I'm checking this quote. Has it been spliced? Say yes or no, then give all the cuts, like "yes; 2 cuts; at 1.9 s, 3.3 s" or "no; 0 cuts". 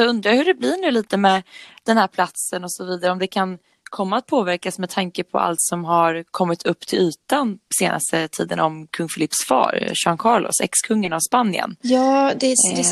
no; 0 cuts